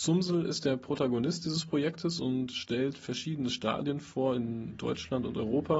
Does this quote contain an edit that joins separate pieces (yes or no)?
no